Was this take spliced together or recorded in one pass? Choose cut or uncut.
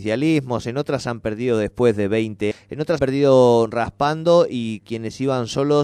cut